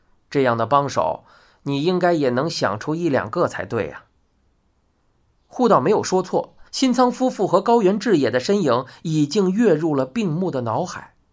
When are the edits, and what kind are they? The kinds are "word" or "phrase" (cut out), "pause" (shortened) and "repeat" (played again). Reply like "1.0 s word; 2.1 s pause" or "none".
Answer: 6.7 s pause